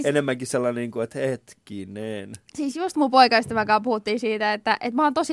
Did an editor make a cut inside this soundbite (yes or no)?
no